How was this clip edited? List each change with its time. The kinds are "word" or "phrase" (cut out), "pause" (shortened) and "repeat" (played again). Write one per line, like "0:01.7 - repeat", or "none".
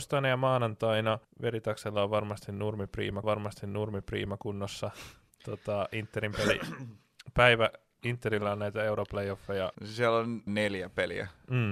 0:01.2 - pause
0:03.2 - repeat
0:09.7 - pause
0:10.5 - phrase